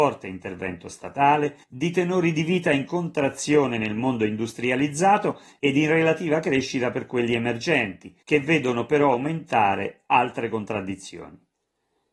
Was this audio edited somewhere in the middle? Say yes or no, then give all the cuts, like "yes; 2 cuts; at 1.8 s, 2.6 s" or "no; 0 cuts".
yes; 2 cuts; at 1.6 s, 8.2 s